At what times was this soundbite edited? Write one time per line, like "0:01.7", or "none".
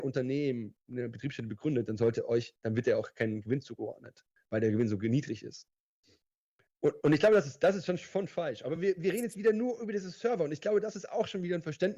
none